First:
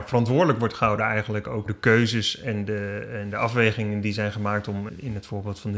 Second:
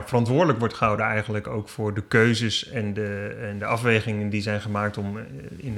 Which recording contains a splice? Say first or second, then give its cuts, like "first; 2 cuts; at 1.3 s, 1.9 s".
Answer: first; 2 cuts; at 1.7 s, 4.9 s